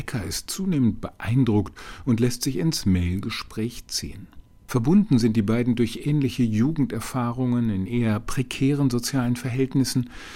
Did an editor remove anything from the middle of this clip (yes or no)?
no